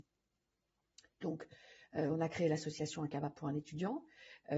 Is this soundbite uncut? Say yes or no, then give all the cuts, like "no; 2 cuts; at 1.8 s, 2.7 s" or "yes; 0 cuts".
yes; 0 cuts